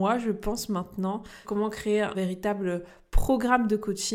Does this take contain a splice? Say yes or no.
yes